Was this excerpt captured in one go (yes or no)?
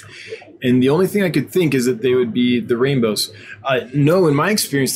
yes